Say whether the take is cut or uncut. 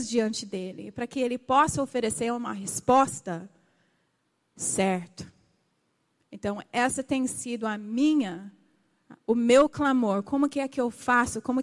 uncut